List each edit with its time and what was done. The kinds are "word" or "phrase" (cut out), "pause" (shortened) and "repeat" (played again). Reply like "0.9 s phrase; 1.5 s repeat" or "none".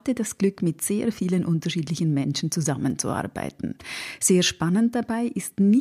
none